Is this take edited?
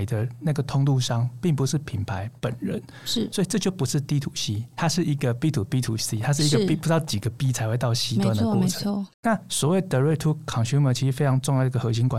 yes; 1 cut; at 9.1 s

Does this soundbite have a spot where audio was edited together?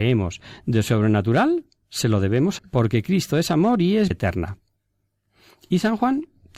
yes; 3 cuts; at 1.8 s, 2.6 s, 4.1 s

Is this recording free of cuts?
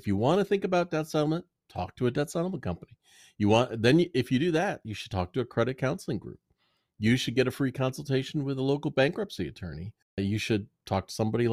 yes; 0 cuts

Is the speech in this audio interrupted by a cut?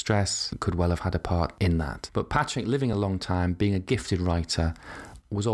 no; 0 cuts

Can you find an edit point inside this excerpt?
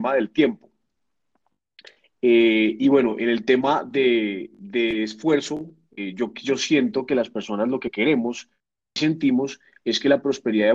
no; 0 cuts

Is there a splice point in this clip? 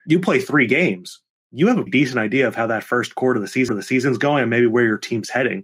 yes; 3 cuts; at 1.3 s, 1.9 s, 3.7 s

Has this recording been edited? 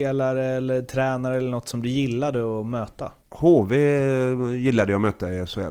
yes; 1 cut; at 3.2 s

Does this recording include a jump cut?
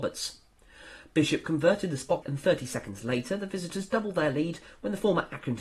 yes; 1 cut; at 2.2 s

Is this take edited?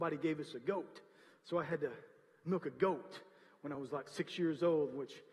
no; 0 cuts

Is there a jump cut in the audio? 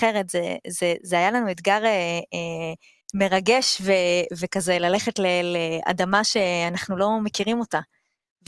yes; 1 cut; at 3.0 s

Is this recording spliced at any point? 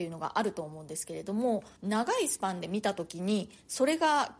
yes; 1 cut; at 1.8 s

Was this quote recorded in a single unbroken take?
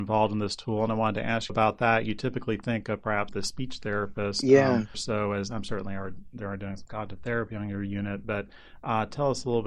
no; 3 cuts; at 1.5 s, 3.3 s, 4.9 s

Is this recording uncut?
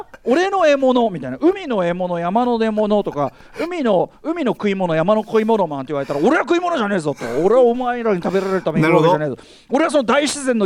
yes; 0 cuts

